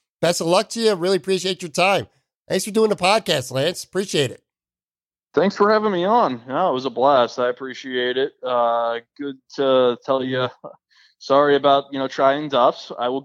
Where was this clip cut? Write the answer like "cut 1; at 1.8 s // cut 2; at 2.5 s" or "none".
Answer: none